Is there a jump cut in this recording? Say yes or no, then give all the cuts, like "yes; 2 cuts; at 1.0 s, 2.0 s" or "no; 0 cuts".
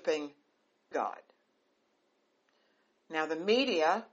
yes; 1 cut; at 0.9 s